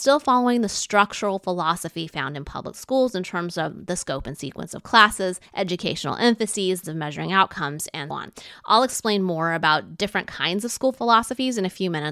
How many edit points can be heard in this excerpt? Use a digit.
3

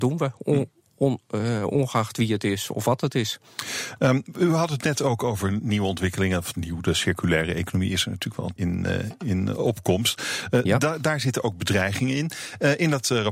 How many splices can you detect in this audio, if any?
1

